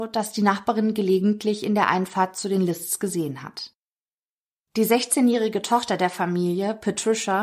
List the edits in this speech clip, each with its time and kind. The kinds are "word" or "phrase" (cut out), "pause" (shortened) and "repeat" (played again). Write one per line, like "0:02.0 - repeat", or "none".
none